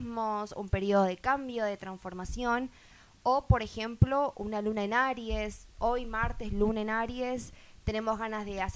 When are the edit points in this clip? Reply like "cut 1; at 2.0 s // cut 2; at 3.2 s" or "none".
none